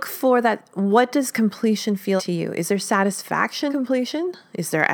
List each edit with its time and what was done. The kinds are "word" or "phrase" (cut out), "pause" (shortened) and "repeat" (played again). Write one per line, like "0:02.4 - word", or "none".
0:02.2 - word
0:03.7 - word

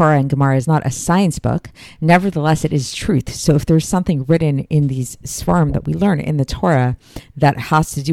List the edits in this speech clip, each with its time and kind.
none

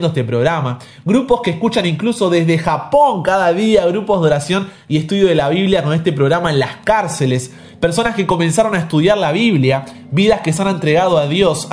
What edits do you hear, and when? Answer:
none

